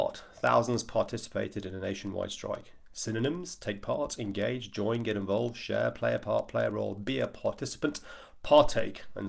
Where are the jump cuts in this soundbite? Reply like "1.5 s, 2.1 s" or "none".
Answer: none